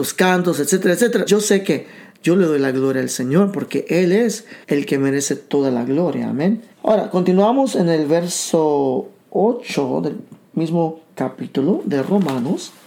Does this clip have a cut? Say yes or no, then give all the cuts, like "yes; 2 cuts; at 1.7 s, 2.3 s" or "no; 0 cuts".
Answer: yes; 4 cuts; at 1.3 s, 4.6 s, 6.7 s, 11.1 s